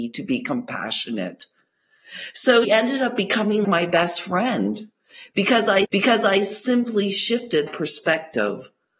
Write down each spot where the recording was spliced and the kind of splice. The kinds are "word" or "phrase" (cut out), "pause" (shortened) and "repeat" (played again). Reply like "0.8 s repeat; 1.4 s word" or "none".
2.6 s word; 3.6 s word; 5.8 s repeat; 7.7 s word